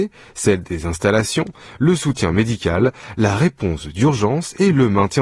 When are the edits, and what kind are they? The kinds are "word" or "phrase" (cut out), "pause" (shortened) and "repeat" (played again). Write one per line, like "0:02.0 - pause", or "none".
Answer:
none